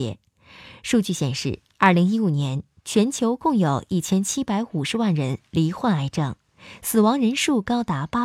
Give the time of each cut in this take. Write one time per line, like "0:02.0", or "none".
0:01.7